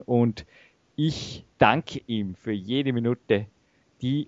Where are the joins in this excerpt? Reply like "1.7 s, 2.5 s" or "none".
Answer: 1.5 s